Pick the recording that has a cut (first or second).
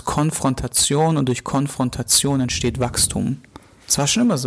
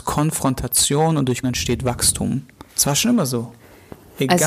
second